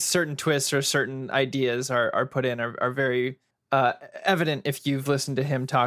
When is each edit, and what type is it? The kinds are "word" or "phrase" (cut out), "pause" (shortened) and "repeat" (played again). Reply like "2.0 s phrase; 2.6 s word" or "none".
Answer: 3.5 s pause